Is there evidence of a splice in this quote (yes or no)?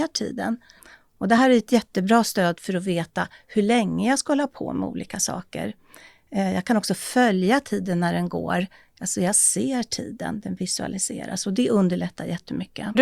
no